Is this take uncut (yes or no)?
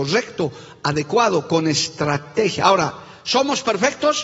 yes